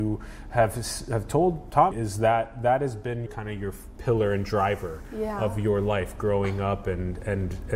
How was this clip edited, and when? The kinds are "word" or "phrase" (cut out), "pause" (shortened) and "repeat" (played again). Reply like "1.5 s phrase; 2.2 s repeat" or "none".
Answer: 1.9 s word; 3.3 s word; 4.0 s word